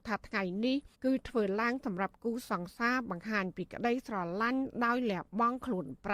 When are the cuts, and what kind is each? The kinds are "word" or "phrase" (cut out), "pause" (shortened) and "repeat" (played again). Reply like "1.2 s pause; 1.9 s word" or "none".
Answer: 0.9 s pause